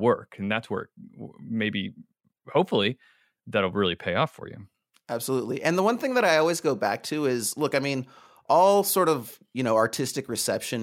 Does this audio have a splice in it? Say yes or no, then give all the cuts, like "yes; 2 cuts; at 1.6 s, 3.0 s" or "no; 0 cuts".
no; 0 cuts